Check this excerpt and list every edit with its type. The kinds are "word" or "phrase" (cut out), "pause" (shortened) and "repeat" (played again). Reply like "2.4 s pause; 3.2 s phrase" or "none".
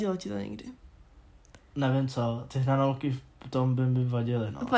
none